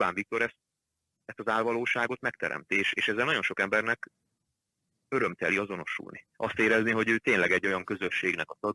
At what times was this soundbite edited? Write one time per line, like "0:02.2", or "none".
none